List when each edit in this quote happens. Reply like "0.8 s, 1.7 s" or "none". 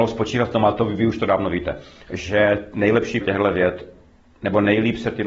3.2 s

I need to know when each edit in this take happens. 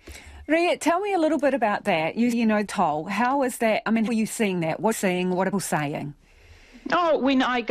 2.3 s, 2.6 s, 4.1 s, 4.9 s, 5.5 s

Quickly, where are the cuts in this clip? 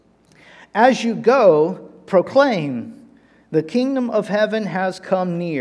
none

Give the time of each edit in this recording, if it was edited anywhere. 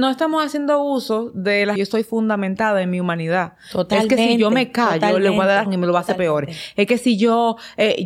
1.8 s, 5.7 s

